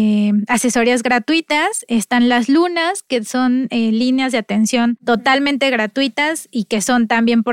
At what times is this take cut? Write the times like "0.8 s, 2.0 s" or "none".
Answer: none

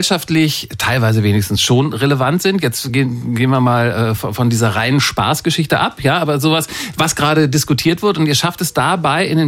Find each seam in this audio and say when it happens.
none

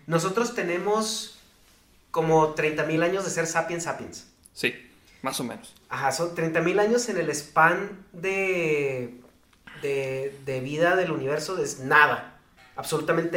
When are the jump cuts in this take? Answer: none

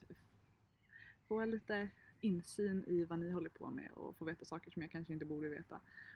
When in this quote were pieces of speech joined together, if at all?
none

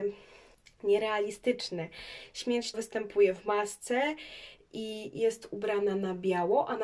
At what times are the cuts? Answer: 2.7 s

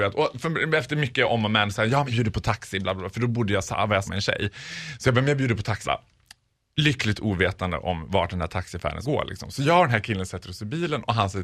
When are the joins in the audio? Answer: 2.1 s, 4.1 s, 5.8 s, 9.0 s

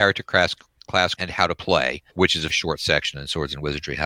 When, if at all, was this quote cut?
1.1 s, 2.1 s, 2.5 s

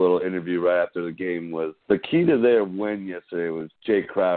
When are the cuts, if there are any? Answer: 1.8 s

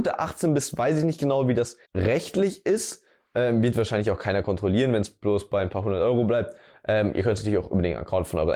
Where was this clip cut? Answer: 1.8 s

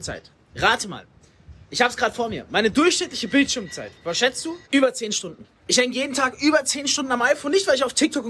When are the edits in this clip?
4.6 s, 5.6 s

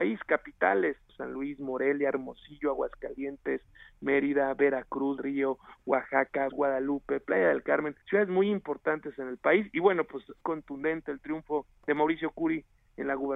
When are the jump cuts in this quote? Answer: 1.1 s, 5.2 s, 6.5 s, 8.0 s, 10.4 s

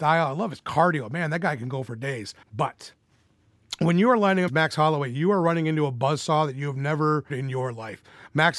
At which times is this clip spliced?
2.4 s, 4.5 s, 7.3 s

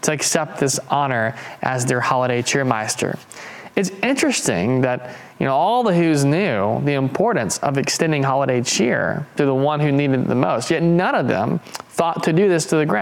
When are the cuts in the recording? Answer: none

